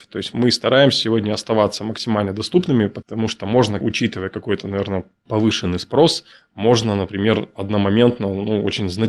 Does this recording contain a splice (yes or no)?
yes